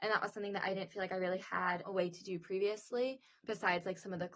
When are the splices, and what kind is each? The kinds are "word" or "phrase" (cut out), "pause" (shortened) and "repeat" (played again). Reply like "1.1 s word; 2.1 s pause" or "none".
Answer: none